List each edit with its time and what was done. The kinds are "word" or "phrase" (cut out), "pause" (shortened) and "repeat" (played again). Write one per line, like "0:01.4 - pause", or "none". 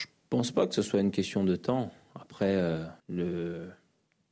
0:03.0 - pause

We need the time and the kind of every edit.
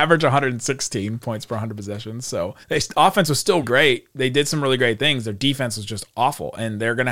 0:02.6 - pause
0:03.6 - word

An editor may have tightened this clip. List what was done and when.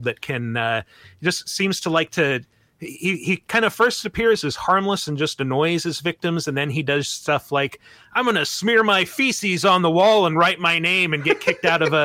none

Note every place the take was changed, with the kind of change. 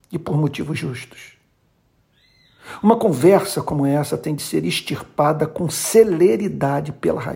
none

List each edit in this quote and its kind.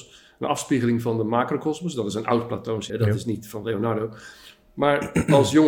0:02.9 - word

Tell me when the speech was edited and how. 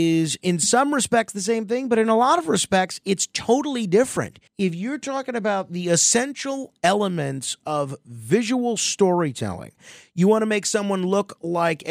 0:04.5 - pause

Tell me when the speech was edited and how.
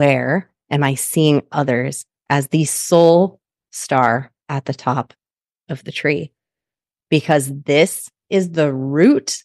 none

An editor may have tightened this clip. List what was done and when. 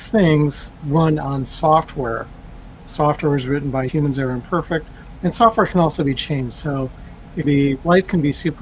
0:03.9 - word
0:07.4 - word

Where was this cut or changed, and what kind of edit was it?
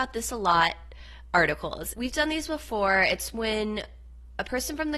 0:01.9 - word

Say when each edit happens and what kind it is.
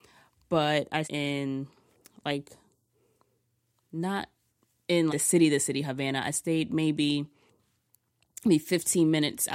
0:01.0 - word
0:05.1 - word

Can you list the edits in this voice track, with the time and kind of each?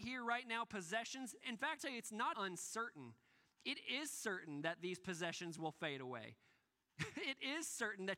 0:01.8 - word
0:02.3 - word

